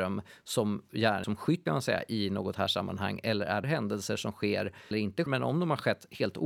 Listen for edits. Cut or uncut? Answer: cut